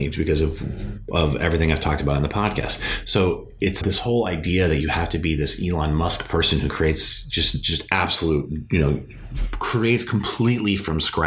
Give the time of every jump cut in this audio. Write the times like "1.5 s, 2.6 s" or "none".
3.8 s